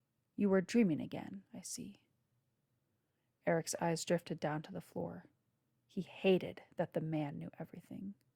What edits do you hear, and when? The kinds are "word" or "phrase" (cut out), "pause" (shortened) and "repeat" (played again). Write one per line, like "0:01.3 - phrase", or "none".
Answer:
0:01.5 - pause